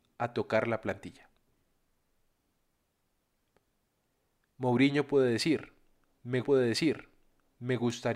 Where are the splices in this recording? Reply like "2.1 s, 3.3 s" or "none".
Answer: 6.4 s